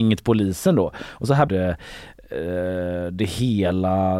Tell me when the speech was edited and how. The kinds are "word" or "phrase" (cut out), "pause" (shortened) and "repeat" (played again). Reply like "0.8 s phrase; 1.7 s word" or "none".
1.5 s phrase